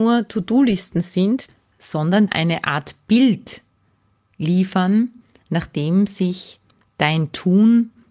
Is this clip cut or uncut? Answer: cut